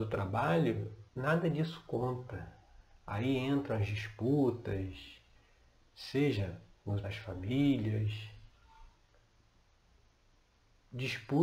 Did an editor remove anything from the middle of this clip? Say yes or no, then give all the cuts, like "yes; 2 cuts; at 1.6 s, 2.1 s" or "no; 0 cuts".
yes; 2 cuts; at 1.1 s, 7.0 s